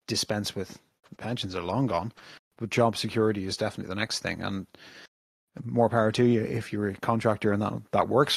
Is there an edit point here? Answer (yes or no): no